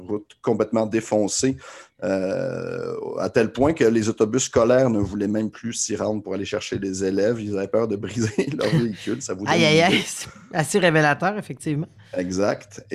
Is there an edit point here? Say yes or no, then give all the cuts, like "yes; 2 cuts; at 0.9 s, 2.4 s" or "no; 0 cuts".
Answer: no; 0 cuts